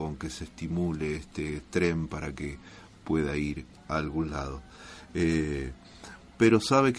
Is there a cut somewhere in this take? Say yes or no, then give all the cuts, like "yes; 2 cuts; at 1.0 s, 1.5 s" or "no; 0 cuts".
no; 0 cuts